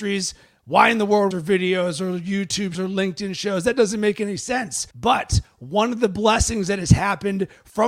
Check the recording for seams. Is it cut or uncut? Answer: cut